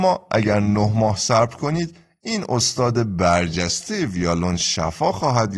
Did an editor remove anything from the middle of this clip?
no; 0 cuts

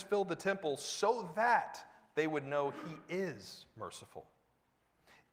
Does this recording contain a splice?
no; 0 cuts

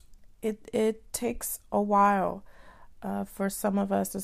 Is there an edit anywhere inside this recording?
no; 0 cuts

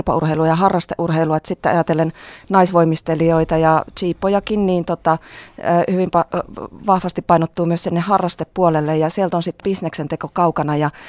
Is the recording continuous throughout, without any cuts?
no; 1 cut; at 9.6 s

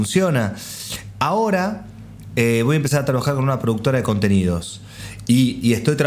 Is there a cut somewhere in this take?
no; 0 cuts

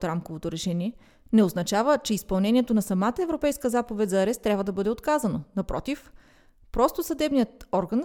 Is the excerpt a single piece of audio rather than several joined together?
yes; 0 cuts

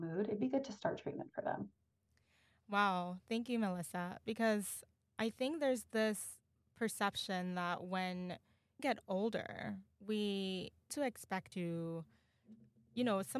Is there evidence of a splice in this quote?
yes; 3 cuts; at 8.8 s, 10.9 s, 11.5 s

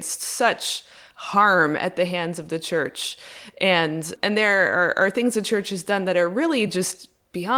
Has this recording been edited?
no; 0 cuts

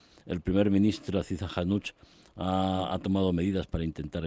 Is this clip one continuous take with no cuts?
yes; 0 cuts

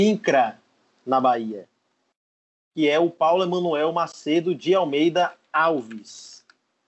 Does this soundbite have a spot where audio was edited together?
no; 0 cuts

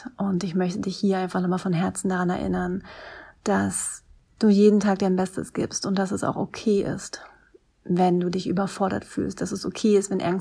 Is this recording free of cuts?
yes; 0 cuts

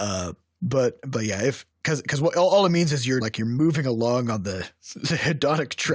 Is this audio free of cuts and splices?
no; 2 cuts; at 1.7 s, 3.2 s

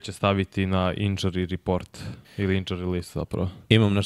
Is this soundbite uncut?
no; 1 cut; at 2.2 s

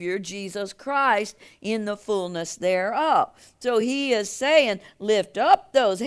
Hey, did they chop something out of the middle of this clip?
no; 0 cuts

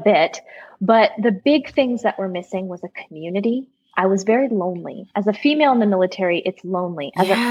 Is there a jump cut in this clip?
no; 0 cuts

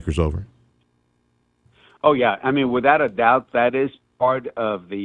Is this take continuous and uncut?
yes; 0 cuts

